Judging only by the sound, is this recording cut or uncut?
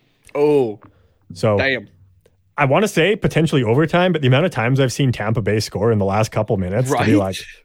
uncut